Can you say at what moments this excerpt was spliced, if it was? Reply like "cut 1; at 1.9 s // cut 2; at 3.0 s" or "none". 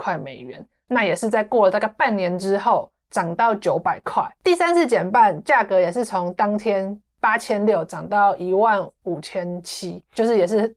cut 1; at 4.4 s